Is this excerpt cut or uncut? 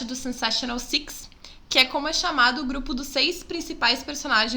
uncut